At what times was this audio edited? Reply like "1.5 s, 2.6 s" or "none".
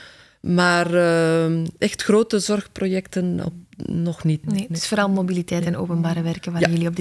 4.4 s